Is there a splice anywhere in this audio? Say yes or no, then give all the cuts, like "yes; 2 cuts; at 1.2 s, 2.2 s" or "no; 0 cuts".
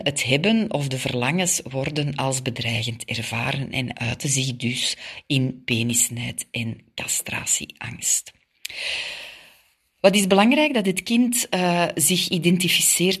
no; 0 cuts